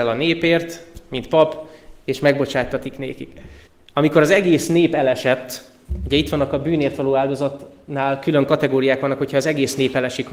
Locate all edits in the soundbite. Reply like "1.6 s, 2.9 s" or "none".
3.7 s